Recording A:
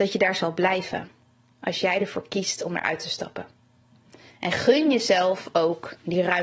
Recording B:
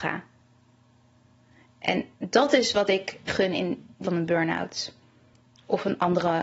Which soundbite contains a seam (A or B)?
B